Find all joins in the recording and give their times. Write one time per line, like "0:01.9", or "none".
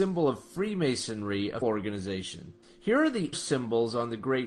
0:01.6
0:02.6
0:03.3